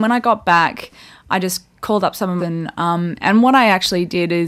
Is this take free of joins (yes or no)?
no